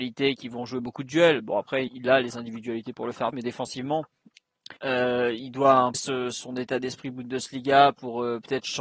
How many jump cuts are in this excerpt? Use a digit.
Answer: 4